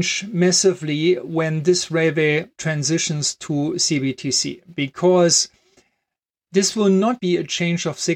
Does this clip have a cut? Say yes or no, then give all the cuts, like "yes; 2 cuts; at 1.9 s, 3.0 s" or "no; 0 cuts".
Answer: yes; 1 cut; at 7.2 s